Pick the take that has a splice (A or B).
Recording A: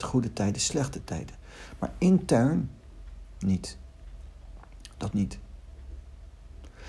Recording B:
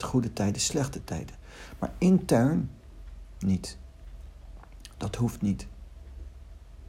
A